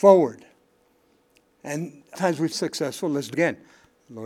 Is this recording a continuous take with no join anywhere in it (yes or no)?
no